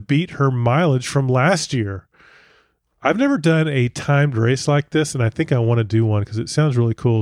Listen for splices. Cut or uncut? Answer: uncut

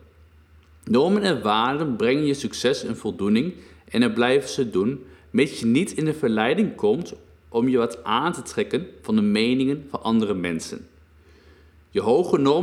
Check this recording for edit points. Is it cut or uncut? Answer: uncut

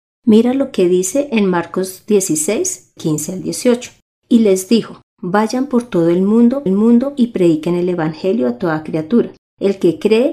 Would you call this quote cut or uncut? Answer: cut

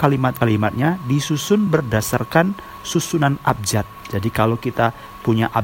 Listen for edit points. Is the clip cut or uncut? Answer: uncut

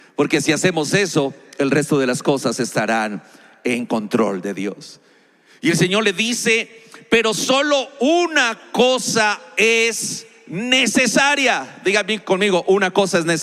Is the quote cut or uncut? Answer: uncut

